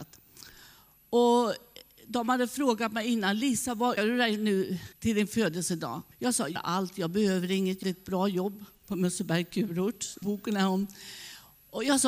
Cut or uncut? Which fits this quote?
cut